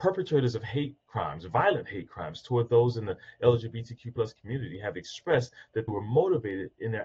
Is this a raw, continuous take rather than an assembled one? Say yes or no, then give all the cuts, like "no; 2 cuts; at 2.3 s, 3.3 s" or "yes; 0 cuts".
no; 1 cut; at 5.9 s